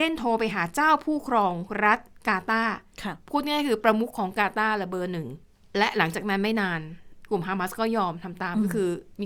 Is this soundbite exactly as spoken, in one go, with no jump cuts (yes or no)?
yes